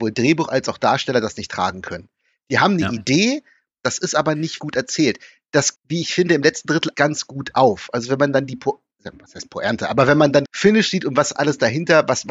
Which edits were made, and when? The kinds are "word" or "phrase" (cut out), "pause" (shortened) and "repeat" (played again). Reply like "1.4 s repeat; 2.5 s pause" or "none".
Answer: 4.6 s word; 5.7 s word; 6.9 s word; 10.4 s word

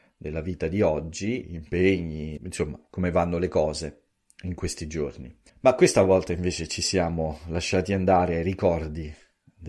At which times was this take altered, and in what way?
1.4 s word; 2.4 s word; 5.5 s pause

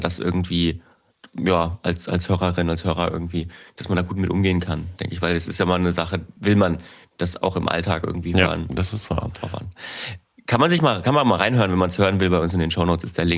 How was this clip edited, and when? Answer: none

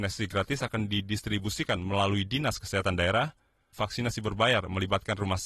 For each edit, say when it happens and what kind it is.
3.7 s word

